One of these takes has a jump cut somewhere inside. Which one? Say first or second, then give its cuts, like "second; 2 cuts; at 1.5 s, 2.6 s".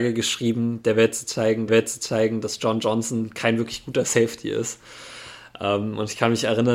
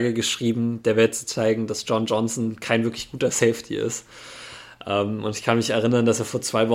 first; 1 cut; at 1.7 s